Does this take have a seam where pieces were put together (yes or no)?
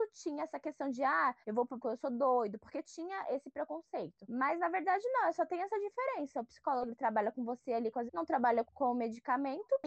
yes